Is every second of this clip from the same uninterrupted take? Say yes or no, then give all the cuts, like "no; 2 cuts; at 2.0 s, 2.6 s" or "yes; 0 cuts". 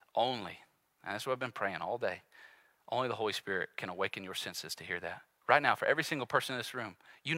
yes; 0 cuts